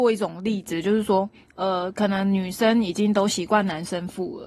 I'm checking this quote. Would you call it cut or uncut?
uncut